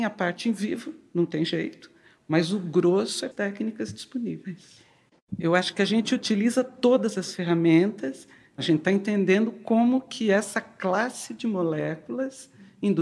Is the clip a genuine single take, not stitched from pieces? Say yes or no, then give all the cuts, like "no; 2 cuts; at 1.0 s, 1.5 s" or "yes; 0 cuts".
no; 1 cut; at 3.3 s